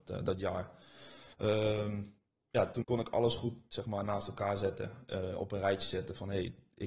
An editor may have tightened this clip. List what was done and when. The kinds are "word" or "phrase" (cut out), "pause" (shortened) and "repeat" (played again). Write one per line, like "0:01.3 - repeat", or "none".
0:01.3 - pause
0:02.8 - word